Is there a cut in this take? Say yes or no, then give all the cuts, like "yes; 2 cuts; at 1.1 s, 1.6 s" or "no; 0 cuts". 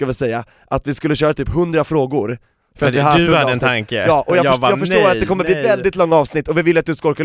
no; 0 cuts